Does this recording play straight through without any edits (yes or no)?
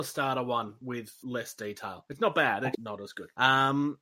no